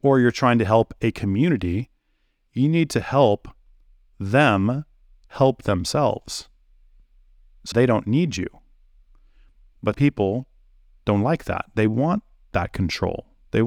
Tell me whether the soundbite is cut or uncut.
cut